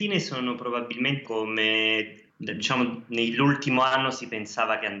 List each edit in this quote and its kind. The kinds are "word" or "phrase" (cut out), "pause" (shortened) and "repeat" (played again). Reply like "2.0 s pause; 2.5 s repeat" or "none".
1.2 s word; 2.3 s phrase